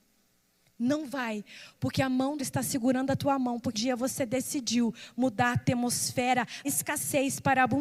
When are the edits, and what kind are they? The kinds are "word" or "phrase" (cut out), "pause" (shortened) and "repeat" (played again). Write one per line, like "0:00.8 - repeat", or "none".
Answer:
0:02.4 - word
0:03.7 - word
0:06.6 - word